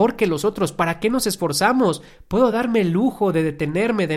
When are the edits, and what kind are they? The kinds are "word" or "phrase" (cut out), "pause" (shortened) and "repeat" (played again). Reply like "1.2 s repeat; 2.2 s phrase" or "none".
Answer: none